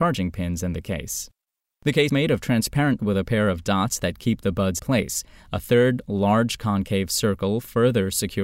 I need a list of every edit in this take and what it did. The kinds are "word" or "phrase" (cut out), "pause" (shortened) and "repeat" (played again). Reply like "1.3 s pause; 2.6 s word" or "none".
2.1 s word; 3.0 s word; 4.8 s word